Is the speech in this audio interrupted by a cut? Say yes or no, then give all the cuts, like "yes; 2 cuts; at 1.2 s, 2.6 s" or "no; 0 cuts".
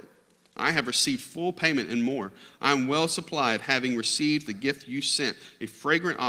yes; 1 cut; at 4.5 s